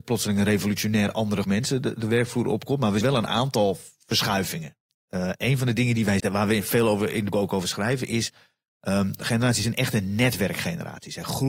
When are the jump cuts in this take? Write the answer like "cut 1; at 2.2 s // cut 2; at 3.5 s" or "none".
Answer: cut 1; at 1.4 s // cut 2; at 3.0 s // cut 3; at 6.2 s // cut 4; at 7.3 s // cut 5; at 9.6 s